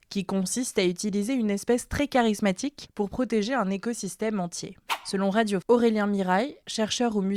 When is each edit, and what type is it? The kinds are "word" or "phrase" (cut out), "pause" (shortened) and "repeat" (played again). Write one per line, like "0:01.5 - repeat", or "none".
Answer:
0:05.6 - word